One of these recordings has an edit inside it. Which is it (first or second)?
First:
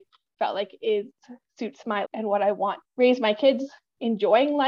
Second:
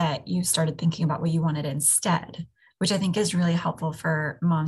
first